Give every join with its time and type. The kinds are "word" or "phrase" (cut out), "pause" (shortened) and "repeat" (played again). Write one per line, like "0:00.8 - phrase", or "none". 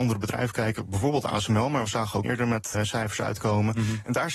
0:02.2 - word
0:02.7 - word